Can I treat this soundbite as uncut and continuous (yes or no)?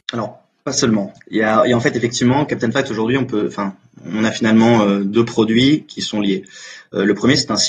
yes